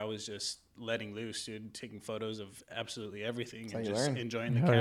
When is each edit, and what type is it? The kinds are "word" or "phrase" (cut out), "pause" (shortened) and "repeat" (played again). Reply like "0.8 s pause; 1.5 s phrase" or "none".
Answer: none